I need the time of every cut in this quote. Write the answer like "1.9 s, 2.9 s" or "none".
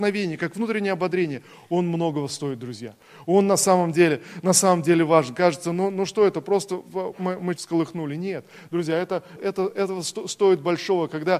7.6 s, 9.4 s